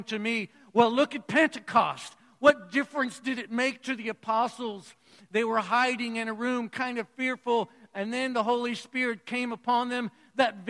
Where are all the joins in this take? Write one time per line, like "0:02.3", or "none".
none